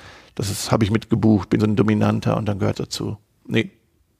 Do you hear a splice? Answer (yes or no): yes